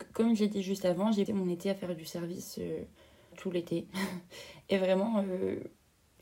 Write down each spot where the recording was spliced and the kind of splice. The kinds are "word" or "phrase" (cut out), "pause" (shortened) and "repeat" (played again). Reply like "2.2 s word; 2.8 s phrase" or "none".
1.3 s word; 3.3 s word